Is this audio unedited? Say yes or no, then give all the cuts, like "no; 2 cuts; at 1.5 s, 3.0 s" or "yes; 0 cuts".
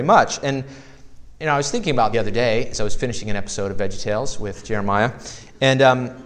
no; 1 cut; at 2.1 s